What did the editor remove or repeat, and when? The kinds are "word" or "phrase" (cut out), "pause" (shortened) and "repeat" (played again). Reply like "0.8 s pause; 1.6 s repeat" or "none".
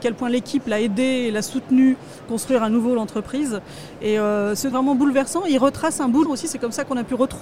2.3 s word; 4.7 s phrase; 6.3 s word